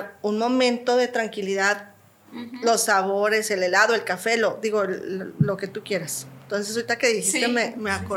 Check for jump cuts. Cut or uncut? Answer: uncut